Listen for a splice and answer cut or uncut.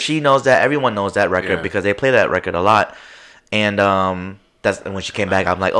uncut